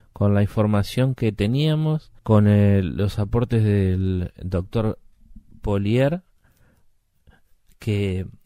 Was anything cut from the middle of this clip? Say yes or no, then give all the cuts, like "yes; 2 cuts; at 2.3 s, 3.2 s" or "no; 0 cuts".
yes; 1 cut; at 2.2 s